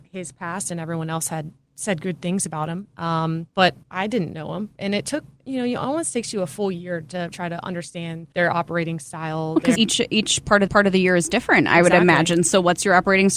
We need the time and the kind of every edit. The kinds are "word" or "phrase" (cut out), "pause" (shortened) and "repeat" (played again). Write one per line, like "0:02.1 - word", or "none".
0:07.3 - word
0:09.8 - word
0:10.7 - repeat